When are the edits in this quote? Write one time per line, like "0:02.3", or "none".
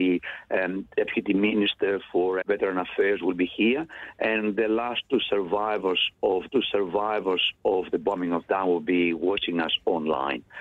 0:02.4
0:06.5